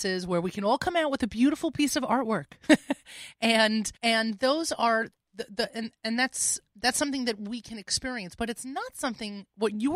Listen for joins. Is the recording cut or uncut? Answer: cut